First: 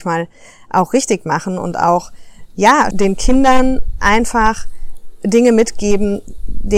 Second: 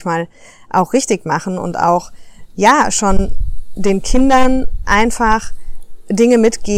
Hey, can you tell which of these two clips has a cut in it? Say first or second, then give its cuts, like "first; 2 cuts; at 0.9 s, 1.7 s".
first; 1 cut; at 2.9 s